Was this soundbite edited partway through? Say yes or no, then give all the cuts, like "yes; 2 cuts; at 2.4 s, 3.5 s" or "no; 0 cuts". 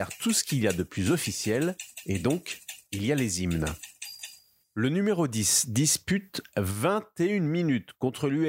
no; 0 cuts